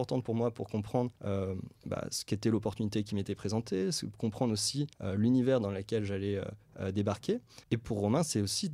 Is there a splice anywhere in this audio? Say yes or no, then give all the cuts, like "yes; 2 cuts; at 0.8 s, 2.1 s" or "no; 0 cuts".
yes; 3 cuts; at 1.2 s, 4.9 s, 7.6 s